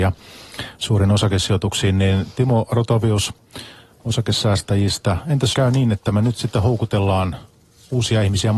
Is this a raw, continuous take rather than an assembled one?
no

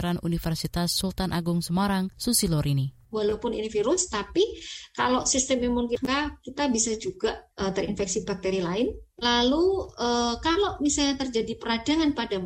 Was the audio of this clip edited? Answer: yes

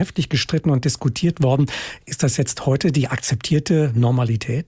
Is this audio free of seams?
yes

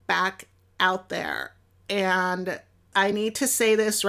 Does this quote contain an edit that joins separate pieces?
no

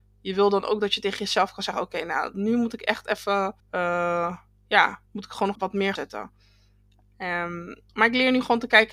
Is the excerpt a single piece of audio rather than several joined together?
no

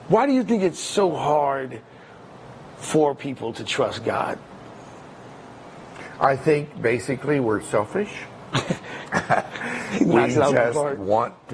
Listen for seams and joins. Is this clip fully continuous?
yes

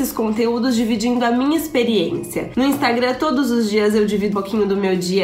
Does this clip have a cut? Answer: yes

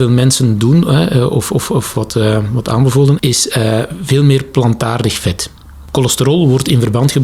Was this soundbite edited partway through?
yes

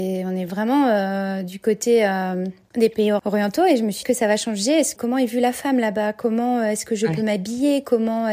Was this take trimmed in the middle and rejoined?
yes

